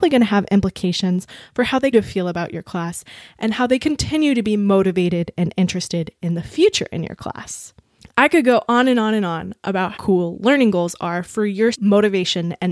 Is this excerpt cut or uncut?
cut